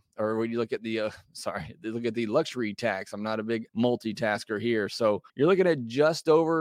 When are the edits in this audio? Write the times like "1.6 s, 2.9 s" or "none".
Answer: 3.7 s, 5.3 s